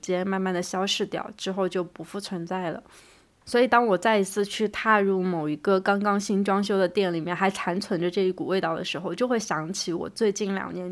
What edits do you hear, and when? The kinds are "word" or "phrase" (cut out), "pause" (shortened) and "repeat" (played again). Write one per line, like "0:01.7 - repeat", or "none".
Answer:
none